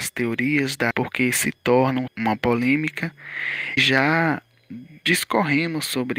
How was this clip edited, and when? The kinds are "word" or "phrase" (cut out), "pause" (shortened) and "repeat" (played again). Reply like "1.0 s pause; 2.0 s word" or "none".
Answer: 0.9 s word; 2.1 s word; 3.8 s word